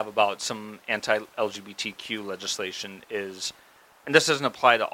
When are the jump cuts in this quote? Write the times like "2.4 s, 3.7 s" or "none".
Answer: 3.9 s